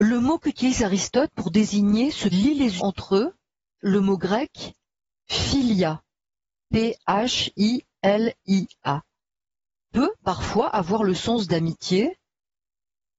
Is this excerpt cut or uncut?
cut